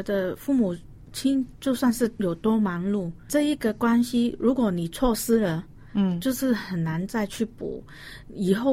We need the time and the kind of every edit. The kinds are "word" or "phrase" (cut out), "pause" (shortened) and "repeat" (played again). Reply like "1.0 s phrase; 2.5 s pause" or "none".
3.3 s word